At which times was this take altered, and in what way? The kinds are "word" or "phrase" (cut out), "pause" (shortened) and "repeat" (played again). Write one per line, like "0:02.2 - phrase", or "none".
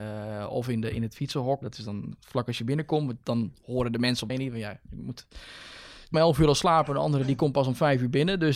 0:01.6 - word
0:04.3 - phrase
0:06.1 - phrase